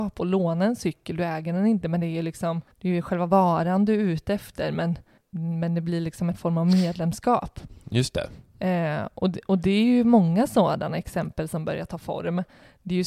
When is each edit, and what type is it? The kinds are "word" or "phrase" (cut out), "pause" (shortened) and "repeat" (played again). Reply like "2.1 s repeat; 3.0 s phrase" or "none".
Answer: 2.7 s pause; 5.2 s word